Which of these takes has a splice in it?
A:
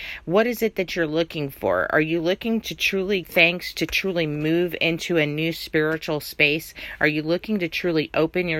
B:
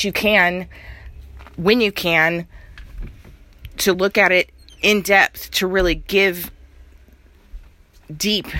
A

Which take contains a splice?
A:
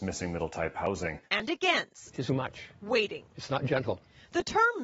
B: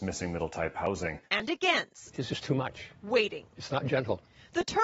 A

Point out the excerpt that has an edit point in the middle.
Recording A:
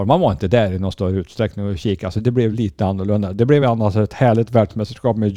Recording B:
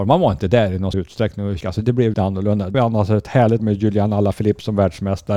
B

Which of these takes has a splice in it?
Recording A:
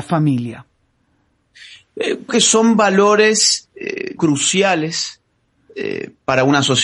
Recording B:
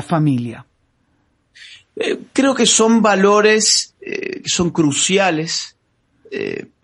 A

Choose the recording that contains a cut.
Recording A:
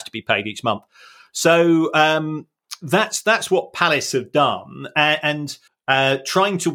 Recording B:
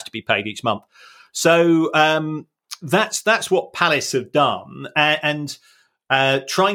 A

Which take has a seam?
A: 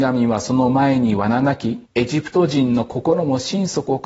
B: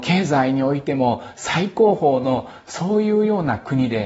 A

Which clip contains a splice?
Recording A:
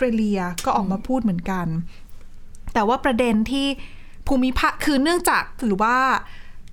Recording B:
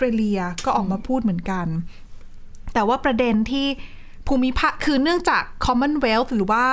A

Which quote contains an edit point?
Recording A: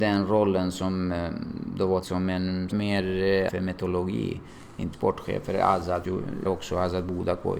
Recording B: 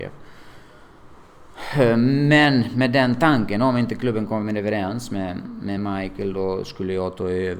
A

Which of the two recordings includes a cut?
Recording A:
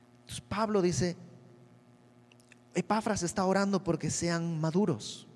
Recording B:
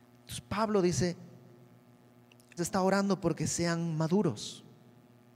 B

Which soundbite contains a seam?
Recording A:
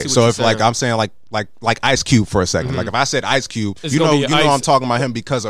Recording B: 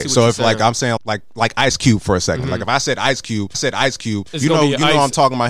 B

